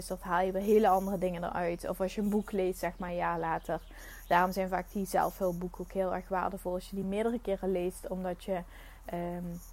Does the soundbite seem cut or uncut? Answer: uncut